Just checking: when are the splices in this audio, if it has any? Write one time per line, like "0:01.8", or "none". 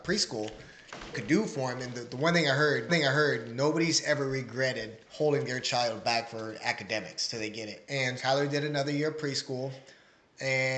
0:01.1
0:02.9
0:05.0
0:08.2